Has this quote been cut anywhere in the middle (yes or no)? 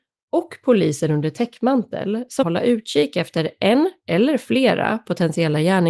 yes